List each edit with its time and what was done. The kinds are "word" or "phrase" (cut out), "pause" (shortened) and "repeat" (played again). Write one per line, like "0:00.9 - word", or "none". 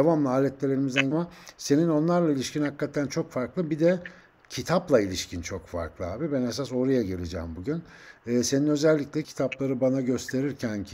0:01.1 - word
0:09.2 - word